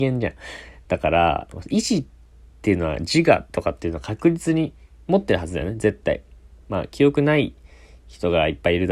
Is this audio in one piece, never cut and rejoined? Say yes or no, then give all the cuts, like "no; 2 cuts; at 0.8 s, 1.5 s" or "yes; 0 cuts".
yes; 0 cuts